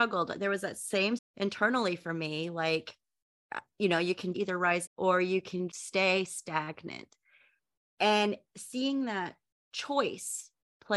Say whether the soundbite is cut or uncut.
cut